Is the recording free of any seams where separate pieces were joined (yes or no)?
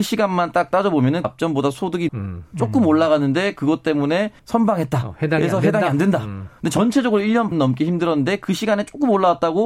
no